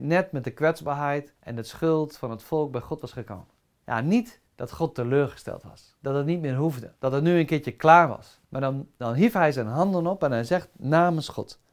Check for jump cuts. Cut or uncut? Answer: cut